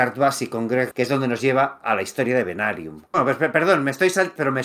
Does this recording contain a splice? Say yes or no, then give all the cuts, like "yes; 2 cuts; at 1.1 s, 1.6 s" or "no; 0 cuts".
yes; 1 cut; at 0.9 s